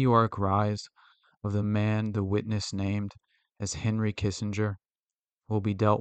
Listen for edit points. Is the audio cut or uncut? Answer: uncut